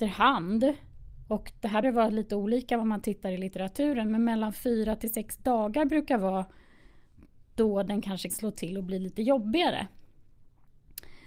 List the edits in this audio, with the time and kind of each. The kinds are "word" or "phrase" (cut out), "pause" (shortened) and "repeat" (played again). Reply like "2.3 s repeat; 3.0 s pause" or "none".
1.8 s word; 8.3 s word